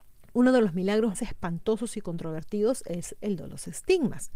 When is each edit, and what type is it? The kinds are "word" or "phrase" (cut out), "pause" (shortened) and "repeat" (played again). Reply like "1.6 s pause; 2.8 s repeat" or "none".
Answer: 1.1 s word